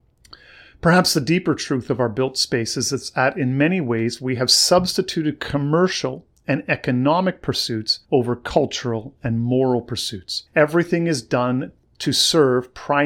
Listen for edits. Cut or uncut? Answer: cut